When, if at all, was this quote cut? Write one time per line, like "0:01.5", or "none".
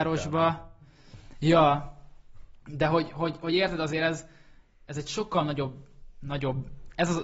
none